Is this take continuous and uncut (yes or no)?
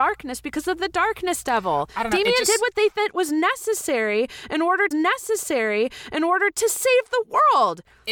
no